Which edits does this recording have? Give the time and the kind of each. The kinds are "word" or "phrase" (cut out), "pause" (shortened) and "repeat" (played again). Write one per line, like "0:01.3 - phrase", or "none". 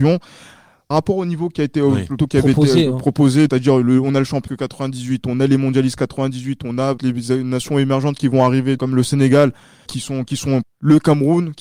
0:00.9 - word
0:02.2 - word
0:03.5 - word
0:04.5 - word
0:07.0 - word
0:08.8 - word
0:09.9 - word
0:10.6 - word